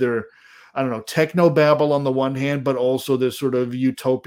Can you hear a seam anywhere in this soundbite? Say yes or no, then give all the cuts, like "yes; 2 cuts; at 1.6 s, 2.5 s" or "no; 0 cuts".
no; 0 cuts